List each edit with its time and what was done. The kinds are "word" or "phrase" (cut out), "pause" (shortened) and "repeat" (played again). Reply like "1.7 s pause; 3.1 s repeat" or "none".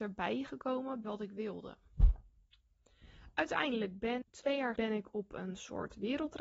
1.0 s word; 4.2 s word; 4.8 s word